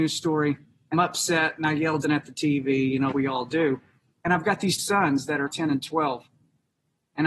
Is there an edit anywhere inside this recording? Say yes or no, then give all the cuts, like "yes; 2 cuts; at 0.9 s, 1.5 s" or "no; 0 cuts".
yes; 5 cuts; at 0.9 s, 2.0 s, 3.1 s, 4.8 s, 5.5 s